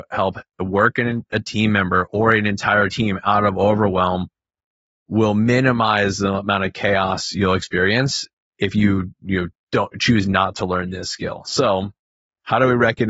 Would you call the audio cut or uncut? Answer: uncut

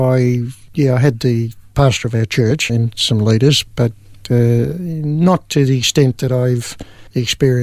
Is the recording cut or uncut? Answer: cut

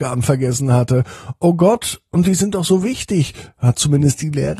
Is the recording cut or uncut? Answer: uncut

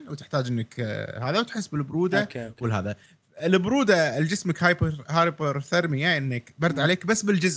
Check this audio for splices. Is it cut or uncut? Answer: uncut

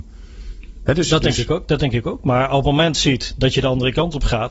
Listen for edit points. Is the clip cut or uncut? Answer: cut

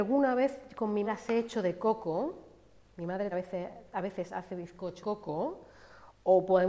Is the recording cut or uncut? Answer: cut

